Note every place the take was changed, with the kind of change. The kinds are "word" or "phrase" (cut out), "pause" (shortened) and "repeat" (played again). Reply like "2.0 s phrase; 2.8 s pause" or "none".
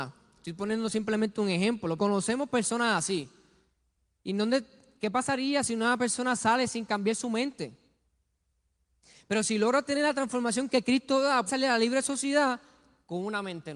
2.0 s word; 11.5 s word